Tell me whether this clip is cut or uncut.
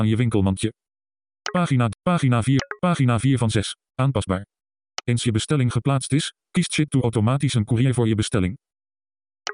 uncut